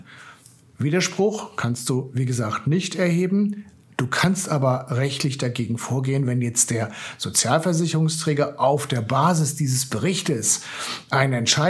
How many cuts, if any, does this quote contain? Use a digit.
0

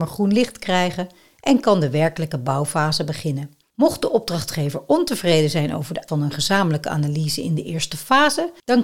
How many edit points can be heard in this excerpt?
1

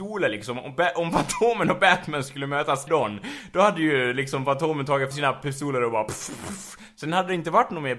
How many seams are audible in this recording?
2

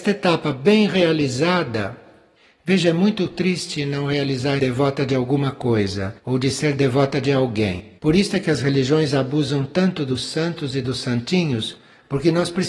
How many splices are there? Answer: 3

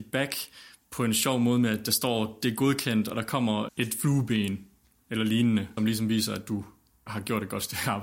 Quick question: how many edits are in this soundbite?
3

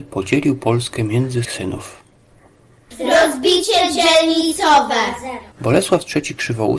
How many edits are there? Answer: 2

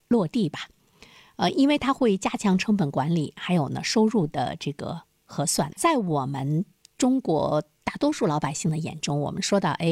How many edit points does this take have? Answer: 1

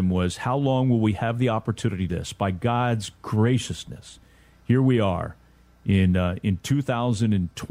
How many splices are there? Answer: 2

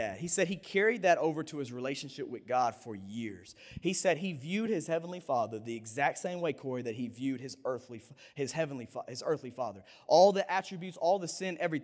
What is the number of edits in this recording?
0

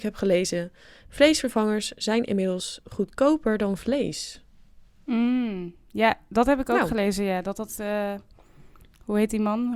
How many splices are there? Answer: 0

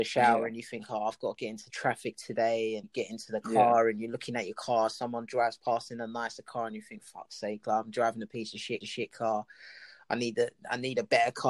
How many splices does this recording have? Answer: 3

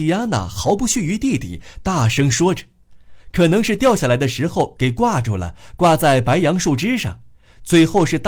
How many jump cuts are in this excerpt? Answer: 0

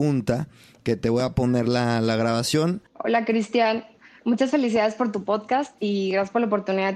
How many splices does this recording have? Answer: 1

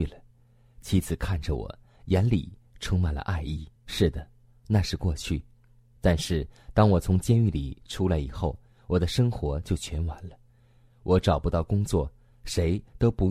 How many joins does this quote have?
1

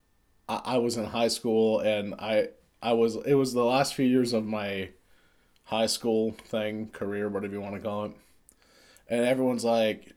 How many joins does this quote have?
0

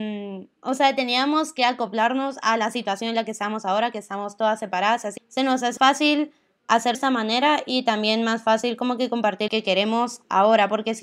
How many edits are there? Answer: 4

